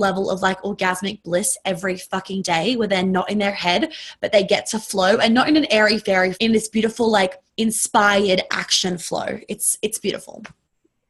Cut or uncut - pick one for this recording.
cut